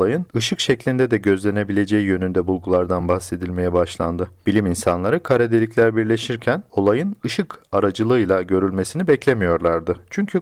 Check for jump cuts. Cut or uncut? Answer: uncut